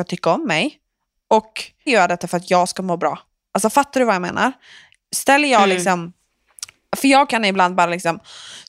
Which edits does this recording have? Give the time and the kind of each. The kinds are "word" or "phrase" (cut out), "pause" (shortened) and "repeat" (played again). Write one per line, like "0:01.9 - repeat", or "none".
0:01.9 - word